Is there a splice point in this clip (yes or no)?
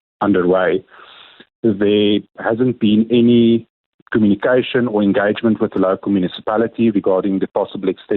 no